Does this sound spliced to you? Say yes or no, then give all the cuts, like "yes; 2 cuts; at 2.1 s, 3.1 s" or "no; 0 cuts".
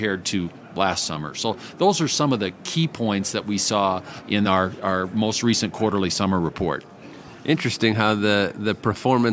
no; 0 cuts